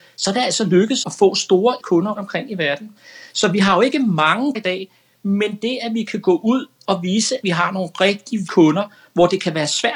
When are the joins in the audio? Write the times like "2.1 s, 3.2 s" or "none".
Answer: 1.0 s, 1.8 s, 2.1 s, 4.5 s, 7.4 s, 8.5 s